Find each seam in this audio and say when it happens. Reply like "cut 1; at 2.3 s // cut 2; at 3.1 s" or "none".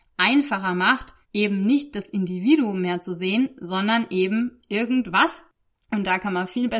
cut 1; at 1.2 s